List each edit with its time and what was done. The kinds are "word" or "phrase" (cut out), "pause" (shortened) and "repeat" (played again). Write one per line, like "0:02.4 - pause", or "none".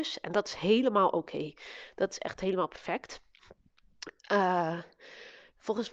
none